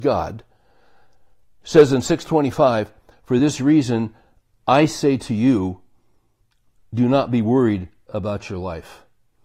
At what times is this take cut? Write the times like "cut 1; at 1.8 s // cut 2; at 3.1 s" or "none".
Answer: none